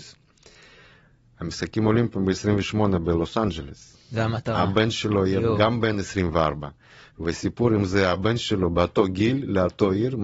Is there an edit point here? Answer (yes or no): no